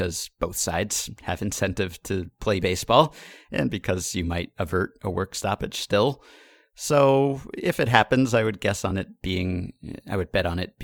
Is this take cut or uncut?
uncut